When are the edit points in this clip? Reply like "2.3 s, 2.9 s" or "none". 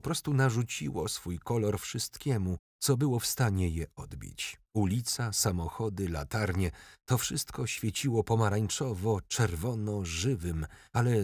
2.7 s, 4.7 s